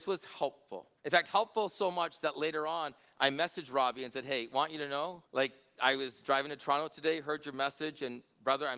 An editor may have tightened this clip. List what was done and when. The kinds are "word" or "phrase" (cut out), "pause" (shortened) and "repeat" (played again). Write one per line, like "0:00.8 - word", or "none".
0:01.0 - pause
0:05.3 - pause